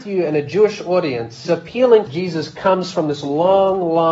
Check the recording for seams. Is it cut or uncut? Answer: cut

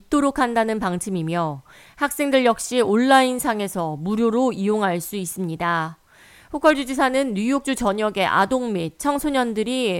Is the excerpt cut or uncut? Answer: uncut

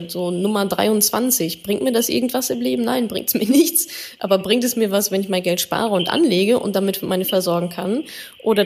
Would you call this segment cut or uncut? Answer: cut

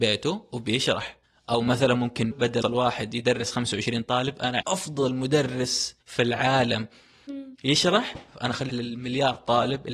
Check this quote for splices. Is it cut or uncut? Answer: cut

